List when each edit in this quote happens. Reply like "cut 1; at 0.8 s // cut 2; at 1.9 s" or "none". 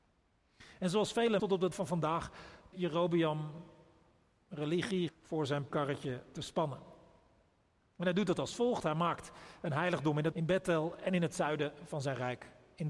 cut 1; at 1.4 s // cut 2; at 1.7 s // cut 3; at 2.7 s // cut 4; at 5.1 s // cut 5; at 5.7 s // cut 6; at 10.3 s